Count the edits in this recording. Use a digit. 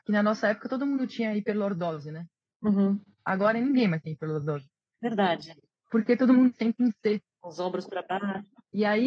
0